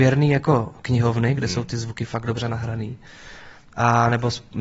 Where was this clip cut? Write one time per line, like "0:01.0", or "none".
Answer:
none

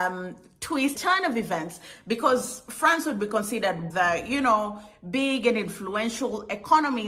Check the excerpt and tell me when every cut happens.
0:01.0
0:03.9

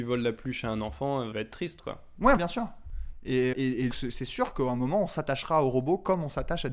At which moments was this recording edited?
0:01.3
0:02.4
0:03.5
0:03.9

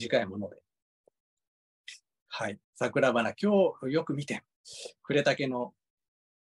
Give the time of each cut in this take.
0:02.6
0:04.6

